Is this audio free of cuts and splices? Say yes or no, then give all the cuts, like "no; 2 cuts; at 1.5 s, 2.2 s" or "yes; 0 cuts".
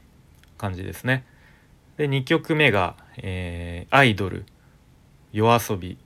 yes; 0 cuts